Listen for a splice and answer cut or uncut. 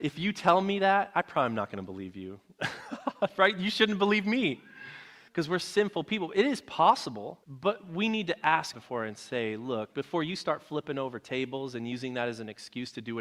cut